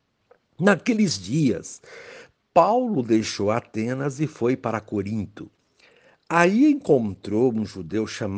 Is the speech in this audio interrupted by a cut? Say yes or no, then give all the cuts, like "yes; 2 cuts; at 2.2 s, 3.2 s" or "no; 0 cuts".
no; 0 cuts